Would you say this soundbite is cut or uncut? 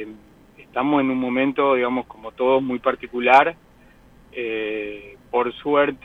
uncut